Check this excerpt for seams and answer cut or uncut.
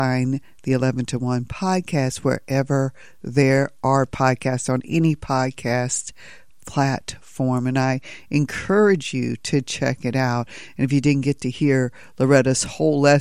uncut